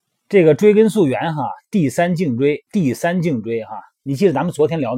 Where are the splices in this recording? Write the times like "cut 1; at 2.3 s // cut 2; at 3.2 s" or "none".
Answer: cut 1; at 2.7 s